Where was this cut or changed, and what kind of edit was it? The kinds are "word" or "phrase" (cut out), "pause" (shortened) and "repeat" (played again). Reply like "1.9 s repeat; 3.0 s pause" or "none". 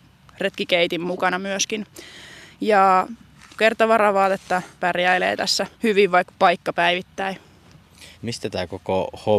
3.6 s word; 4.8 s word; 5.7 s pause; 6.3 s word; 8.1 s pause